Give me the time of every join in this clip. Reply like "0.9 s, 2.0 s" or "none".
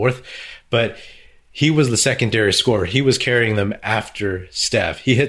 none

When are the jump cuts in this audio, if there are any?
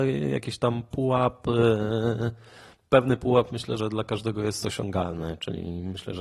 3.8 s

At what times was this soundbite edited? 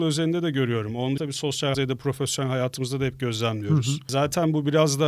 1.2 s, 1.7 s

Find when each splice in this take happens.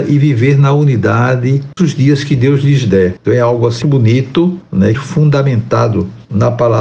1.8 s, 3.8 s, 4.9 s

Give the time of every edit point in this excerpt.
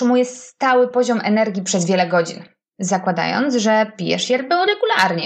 none

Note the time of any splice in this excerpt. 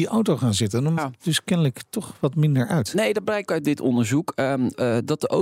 1.0 s, 3.5 s

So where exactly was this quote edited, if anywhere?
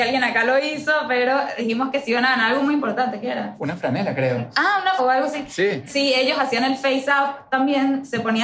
5.0 s

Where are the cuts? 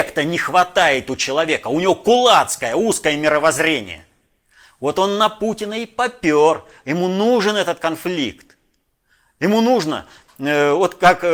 none

